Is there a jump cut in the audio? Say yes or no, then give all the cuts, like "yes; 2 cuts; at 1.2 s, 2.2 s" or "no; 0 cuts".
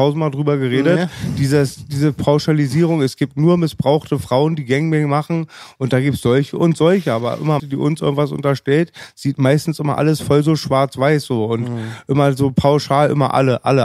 yes; 1 cut; at 7.6 s